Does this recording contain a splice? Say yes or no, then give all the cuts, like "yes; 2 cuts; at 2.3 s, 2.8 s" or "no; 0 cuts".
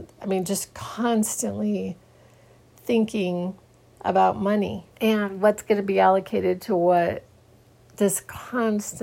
yes; 1 cut; at 4.9 s